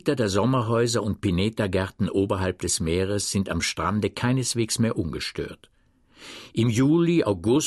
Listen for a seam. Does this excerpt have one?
no; 0 cuts

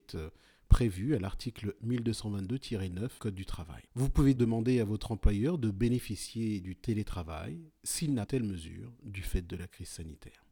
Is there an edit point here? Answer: yes; 5 cuts; at 1.8 s, 3.2 s, 3.9 s, 4.4 s, 8.3 s

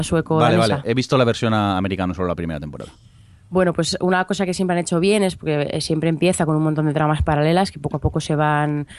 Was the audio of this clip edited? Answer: no; 0 cuts

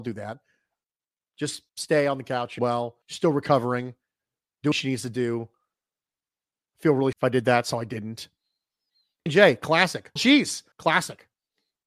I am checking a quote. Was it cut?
yes; 8 cuts; at 1.7 s, 2.6 s, 3.0 s, 4.7 s, 7.1 s, 9.3 s, 10.2 s, 10.7 s

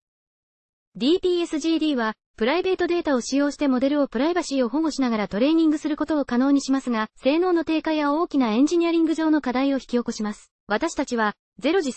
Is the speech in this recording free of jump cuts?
no; 2 cuts; at 7.1 s, 10.6 s

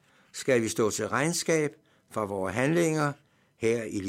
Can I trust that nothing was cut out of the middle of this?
yes; 0 cuts

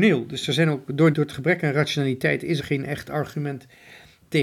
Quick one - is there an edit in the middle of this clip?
yes; 2 cuts; at 1.1 s, 2.6 s

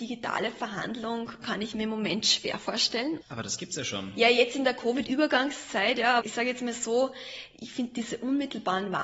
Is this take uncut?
no; 2 cuts; at 3.2 s, 6.2 s

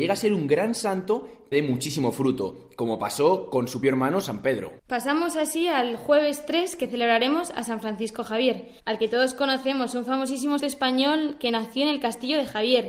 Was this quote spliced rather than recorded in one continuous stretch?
yes; 5 cuts; at 1.5 s, 3.8 s, 4.8 s, 8.8 s, 10.6 s

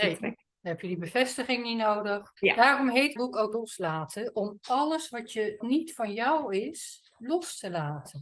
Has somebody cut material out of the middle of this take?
yes; 4 cuts; at 2.4 s, 3.2 s, 3.5 s, 5.6 s

